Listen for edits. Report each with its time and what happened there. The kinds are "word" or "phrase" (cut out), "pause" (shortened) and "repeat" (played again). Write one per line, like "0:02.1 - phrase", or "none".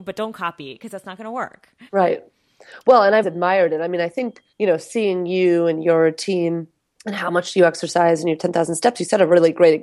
0:01.9 - pause
0:03.2 - word
0:04.5 - pause
0:06.8 - pause